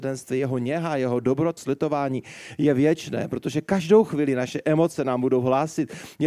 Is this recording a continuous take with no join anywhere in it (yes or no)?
no